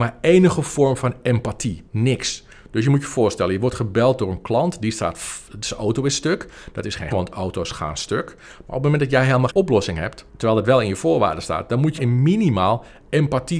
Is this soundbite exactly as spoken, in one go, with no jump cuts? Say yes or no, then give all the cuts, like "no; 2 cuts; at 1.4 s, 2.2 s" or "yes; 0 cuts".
no; 5 cuts; at 1.9 s, 7.1 s, 9.5 s, 10.3 s, 12.0 s